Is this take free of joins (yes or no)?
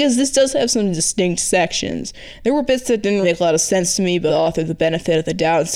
no